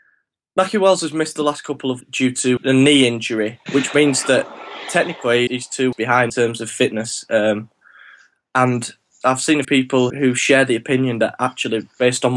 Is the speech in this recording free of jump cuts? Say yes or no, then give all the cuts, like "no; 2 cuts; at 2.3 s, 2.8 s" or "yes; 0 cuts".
no; 9 cuts; at 2.0 s, 2.6 s, 3.7 s, 5.5 s, 5.9 s, 6.3 s, 9.2 s, 9.6 s, 10.1 s